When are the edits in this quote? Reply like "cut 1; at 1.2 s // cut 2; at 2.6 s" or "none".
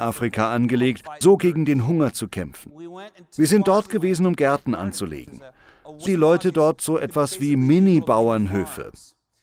cut 1; at 1.2 s // cut 2; at 6.1 s